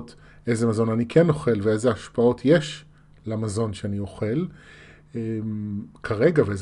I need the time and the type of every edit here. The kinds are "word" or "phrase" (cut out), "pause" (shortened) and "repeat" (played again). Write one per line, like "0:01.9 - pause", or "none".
none